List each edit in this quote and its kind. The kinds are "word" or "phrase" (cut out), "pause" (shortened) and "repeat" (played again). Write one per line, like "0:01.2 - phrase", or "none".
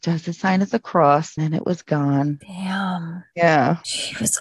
0:01.4 - word